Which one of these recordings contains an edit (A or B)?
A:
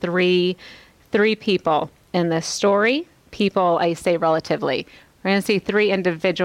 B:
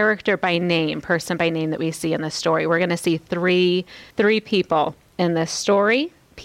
B